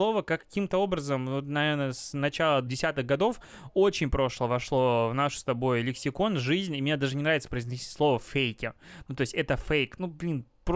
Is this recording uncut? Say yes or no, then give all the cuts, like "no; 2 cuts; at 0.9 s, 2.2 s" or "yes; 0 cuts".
no; 1 cut; at 2.7 s